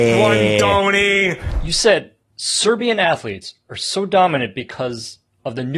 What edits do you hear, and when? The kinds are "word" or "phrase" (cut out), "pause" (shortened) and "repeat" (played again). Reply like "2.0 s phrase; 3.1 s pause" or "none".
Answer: 2.2 s pause